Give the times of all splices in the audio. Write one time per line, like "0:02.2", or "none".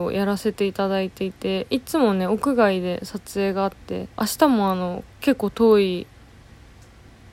0:04.1